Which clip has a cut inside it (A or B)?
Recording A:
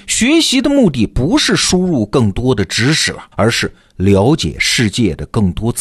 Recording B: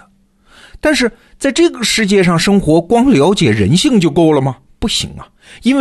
A